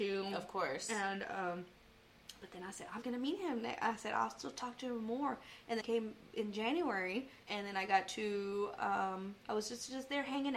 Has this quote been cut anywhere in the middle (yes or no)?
yes